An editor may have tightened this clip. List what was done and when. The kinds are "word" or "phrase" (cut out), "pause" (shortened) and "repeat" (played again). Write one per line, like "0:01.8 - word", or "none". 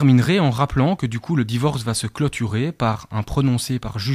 none